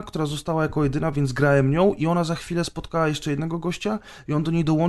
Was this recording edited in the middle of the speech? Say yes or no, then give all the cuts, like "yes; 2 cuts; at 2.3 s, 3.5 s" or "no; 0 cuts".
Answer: no; 0 cuts